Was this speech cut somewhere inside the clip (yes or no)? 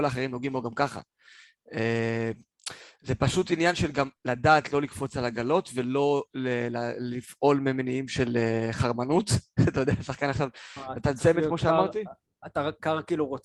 no